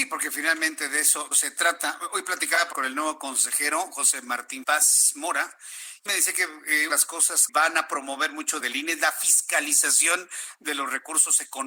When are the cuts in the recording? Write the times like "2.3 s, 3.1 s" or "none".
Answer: 1.3 s, 2.7 s, 4.6 s, 6.1 s, 6.9 s, 7.5 s, 8.6 s